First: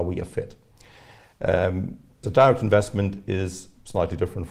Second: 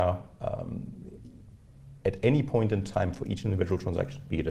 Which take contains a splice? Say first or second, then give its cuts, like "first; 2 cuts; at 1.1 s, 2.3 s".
first; 1 cut; at 2.2 s